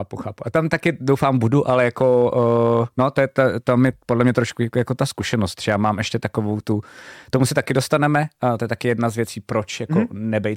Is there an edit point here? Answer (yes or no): no